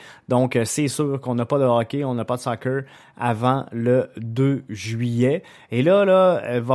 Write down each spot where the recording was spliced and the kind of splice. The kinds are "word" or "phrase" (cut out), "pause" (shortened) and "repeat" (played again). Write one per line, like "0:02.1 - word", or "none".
none